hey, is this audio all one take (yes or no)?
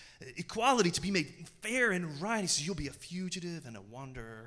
yes